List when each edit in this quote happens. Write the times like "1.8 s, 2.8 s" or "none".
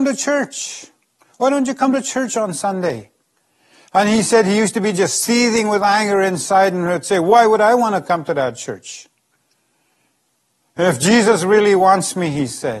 none

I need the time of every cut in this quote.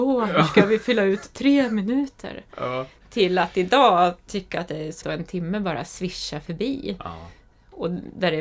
5.0 s

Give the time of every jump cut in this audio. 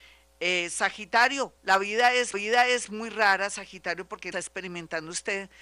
1.6 s, 2.3 s, 4.3 s

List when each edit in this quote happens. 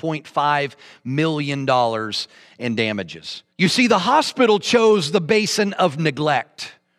3.5 s

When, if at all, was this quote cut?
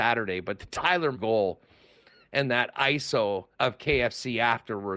1.1 s, 3.5 s

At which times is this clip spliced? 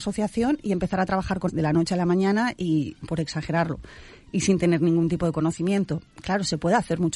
1.5 s

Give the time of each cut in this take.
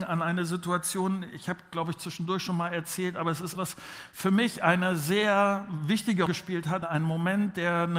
3.6 s, 6.3 s, 6.8 s

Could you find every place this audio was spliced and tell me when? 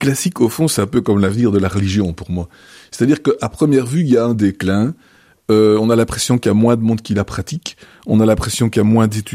none

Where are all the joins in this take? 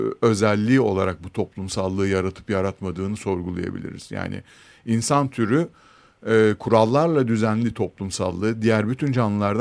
none

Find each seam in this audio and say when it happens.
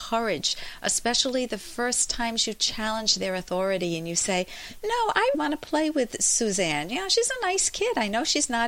5.3 s

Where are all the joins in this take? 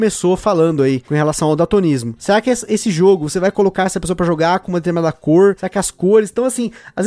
none

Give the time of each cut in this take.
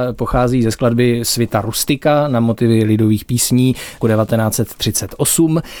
4.0 s

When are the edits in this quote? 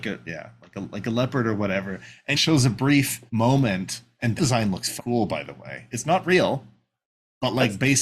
2.3 s, 3.3 s, 4.4 s, 5.0 s

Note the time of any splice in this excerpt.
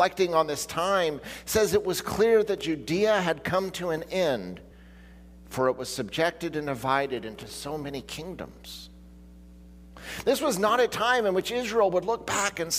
none

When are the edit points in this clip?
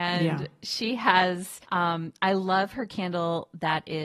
1.6 s

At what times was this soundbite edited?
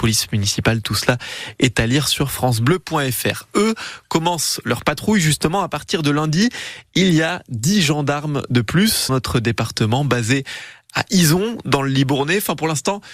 9.1 s

